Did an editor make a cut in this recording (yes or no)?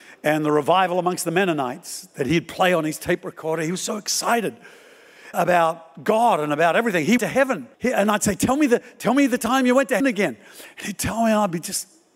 yes